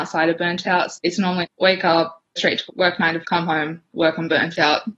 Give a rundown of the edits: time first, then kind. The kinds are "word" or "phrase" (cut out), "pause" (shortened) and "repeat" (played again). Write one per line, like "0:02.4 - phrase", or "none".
0:01.0 - word
0:01.4 - word
0:02.4 - word
0:02.7 - word
0:03.2 - word